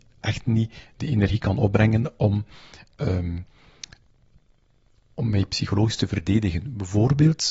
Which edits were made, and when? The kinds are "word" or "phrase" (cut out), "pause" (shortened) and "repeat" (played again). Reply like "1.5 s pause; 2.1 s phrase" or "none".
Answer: none